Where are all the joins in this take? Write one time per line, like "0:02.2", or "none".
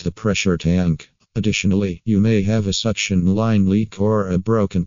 none